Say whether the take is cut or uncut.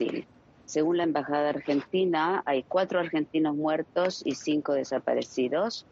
uncut